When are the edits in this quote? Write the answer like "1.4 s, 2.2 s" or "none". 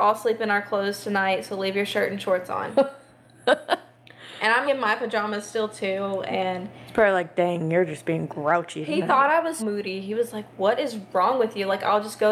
4.6 s, 9.6 s